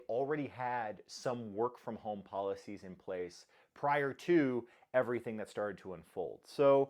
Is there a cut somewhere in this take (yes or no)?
no